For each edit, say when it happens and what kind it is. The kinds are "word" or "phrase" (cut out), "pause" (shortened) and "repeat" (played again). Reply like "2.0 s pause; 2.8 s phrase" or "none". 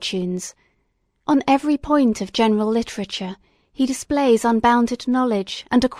none